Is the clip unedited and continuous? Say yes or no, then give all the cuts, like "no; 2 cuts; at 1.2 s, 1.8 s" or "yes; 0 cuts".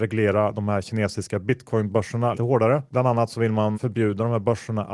no; 3 cuts; at 2.3 s, 2.9 s, 3.7 s